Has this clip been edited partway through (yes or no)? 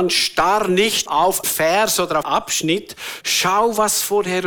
yes